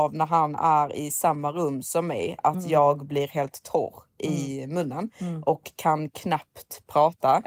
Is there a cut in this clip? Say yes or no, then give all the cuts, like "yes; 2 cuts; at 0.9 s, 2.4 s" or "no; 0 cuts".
no; 0 cuts